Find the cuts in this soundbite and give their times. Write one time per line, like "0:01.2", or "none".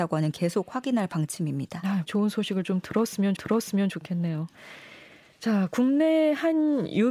0:02.1
0:03.4